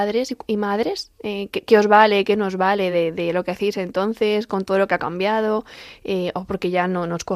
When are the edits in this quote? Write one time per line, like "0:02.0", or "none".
none